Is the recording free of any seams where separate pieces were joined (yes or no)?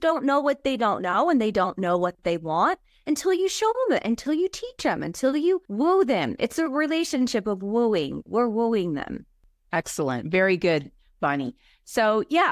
no